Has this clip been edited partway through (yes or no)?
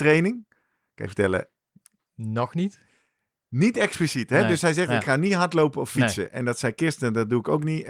no